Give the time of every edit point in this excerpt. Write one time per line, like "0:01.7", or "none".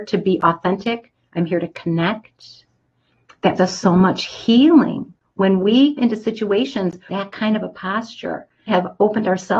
0:03.6
0:06.0
0:07.1
0:08.7